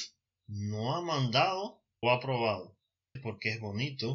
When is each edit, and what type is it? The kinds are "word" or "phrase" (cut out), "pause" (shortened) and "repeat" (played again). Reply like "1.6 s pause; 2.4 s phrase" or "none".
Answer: 2.0 s word; 3.2 s word